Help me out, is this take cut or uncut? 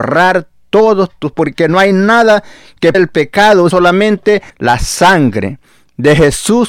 cut